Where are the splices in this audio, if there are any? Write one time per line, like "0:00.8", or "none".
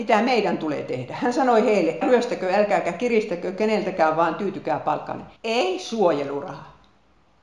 0:02.0
0:05.4